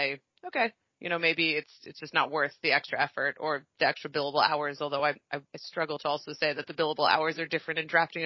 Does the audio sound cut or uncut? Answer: uncut